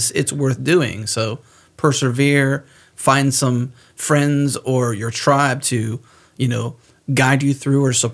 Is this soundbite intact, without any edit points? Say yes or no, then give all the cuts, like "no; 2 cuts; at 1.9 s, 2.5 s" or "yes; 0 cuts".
yes; 0 cuts